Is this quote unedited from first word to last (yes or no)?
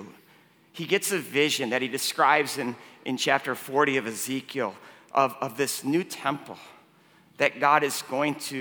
yes